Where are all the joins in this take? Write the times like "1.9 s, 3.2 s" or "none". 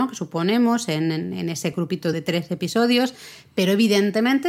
none